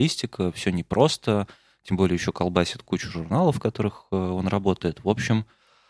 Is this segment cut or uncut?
uncut